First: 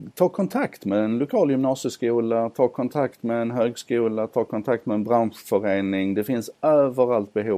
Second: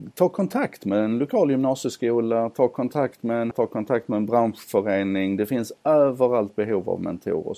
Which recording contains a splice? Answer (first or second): second